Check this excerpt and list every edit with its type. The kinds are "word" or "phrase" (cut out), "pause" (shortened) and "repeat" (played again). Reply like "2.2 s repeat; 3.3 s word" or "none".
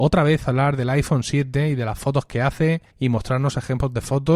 2.9 s pause

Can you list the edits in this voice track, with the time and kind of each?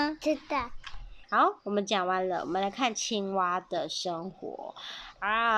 1.2 s pause

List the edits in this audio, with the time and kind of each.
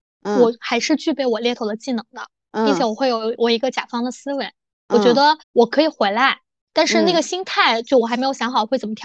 5.4 s pause

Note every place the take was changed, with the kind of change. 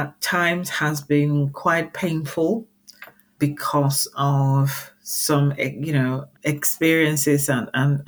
3.4 s word; 6.3 s word

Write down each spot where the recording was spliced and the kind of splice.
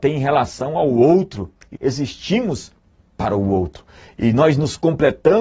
1.8 s word

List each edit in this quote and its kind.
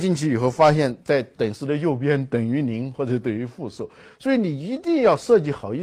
none

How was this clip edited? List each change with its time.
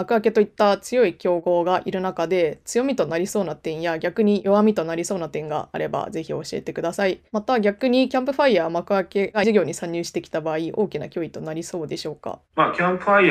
9.4 s word

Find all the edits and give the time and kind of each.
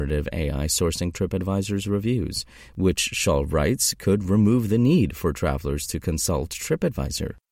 none

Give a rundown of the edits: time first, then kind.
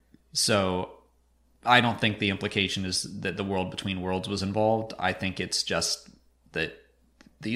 none

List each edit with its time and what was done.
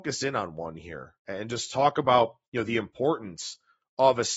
2.5 s pause

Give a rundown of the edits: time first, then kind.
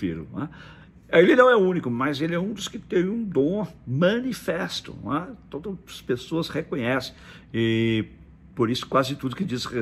none

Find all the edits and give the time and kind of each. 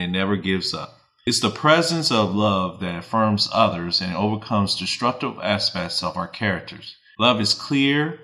none

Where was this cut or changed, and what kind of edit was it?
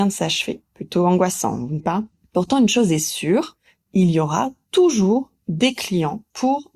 1.8 s word

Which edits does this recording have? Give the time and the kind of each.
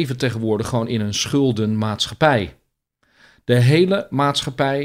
none

